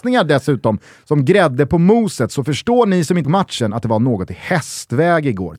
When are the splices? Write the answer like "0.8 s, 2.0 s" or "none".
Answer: 3.2 s